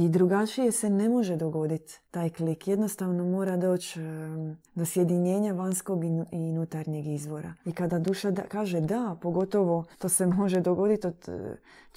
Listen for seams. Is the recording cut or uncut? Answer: cut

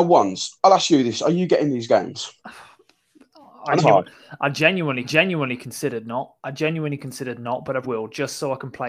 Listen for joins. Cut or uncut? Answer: cut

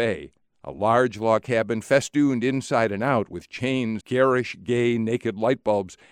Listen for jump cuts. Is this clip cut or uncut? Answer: cut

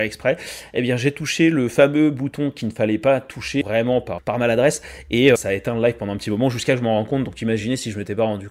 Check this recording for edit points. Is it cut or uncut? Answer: cut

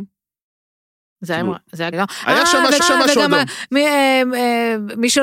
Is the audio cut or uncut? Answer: cut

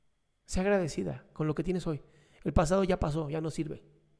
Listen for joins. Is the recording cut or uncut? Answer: uncut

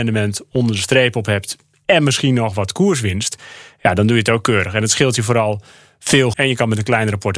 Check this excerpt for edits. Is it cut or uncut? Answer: cut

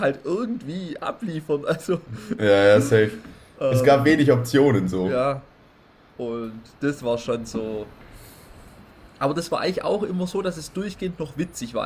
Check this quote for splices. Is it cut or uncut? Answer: uncut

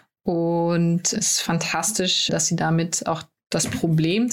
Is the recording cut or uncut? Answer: cut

